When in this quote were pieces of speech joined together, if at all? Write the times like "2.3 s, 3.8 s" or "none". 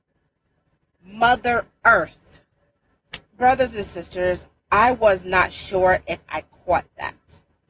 3.3 s